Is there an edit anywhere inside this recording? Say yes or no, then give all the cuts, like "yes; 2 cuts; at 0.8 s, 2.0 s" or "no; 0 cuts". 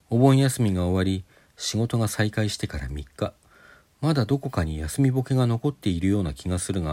no; 0 cuts